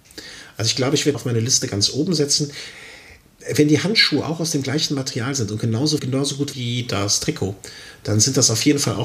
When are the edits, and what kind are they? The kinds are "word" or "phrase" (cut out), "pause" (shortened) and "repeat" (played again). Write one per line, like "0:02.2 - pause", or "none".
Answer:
0:01.1 - phrase
0:06.0 - word
0:06.5 - word